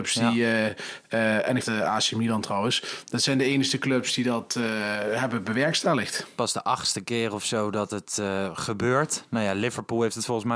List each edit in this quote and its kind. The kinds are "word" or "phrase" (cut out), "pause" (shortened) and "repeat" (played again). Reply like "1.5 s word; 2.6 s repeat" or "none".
1.6 s word